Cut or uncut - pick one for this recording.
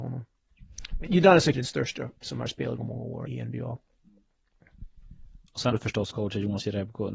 cut